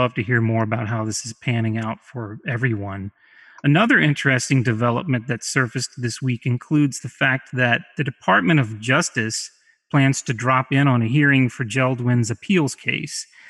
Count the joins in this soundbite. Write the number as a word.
zero